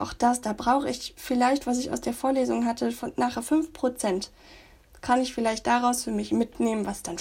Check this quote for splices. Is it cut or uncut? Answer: uncut